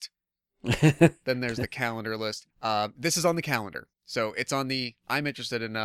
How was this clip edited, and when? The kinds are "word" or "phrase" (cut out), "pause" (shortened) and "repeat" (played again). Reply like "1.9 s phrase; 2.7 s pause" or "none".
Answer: 2.5 s pause; 3.9 s pause